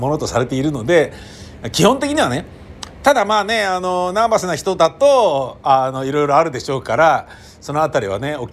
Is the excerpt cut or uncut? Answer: uncut